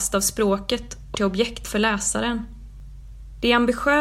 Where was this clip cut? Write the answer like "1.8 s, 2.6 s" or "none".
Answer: 1.1 s

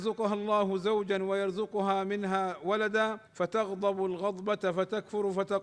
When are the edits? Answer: 3.3 s

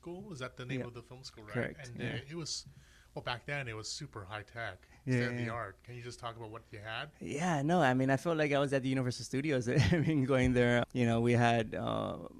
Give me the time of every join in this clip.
10.8 s

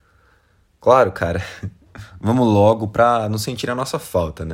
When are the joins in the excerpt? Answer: none

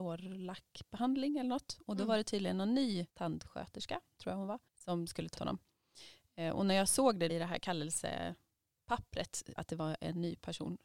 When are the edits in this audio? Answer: 3.1 s, 4.7 s, 5.4 s, 7.3 s, 9.6 s

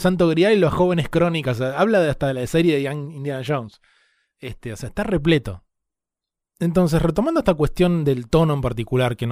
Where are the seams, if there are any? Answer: none

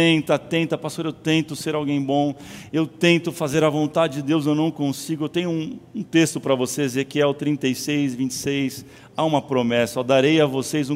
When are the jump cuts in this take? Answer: none

